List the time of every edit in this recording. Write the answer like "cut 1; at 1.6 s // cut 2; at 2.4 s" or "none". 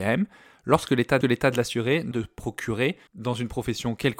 cut 1; at 1.2 s // cut 2; at 2.1 s // cut 3; at 3.1 s

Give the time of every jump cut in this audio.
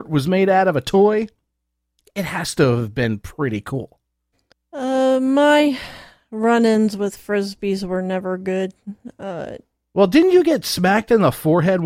cut 1; at 4.5 s

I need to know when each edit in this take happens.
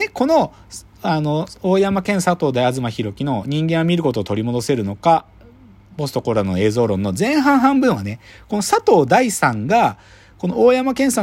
none

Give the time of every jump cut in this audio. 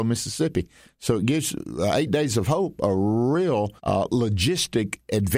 cut 1; at 3.8 s

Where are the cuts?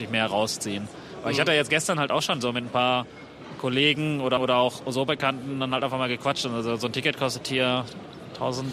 cut 1; at 4.4 s

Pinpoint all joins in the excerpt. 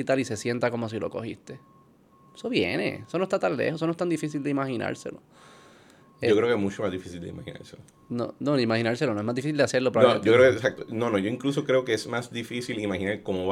none

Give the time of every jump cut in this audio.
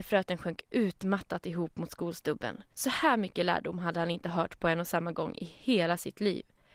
cut 1; at 2.7 s

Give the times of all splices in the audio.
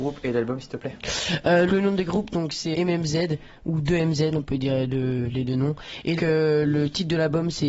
cut 1; at 1.7 s // cut 2; at 2.7 s // cut 3; at 6.2 s

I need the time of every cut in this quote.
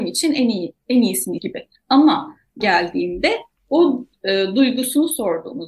cut 1; at 1.4 s // cut 2; at 2.6 s

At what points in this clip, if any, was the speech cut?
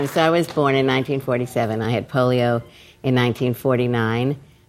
none

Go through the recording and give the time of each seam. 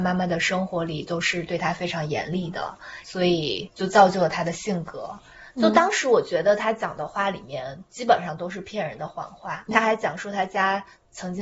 cut 1; at 9.7 s

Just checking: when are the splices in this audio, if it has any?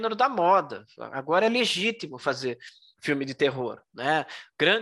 none

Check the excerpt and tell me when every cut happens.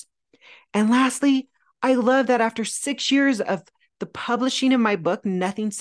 none

